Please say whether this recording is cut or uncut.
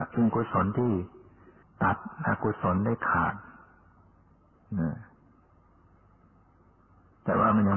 cut